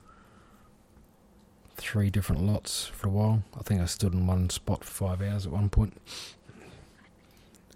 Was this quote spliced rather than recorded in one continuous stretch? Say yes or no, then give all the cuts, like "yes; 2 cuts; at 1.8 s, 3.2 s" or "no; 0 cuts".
yes; 2 cuts; at 3.0 s, 4.9 s